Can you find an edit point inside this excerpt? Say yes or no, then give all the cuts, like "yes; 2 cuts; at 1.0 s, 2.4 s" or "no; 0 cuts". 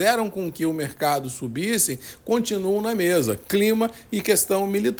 no; 0 cuts